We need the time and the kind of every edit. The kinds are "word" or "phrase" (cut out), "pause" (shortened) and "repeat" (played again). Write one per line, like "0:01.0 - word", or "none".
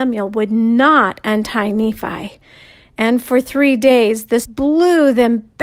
0:04.4 - word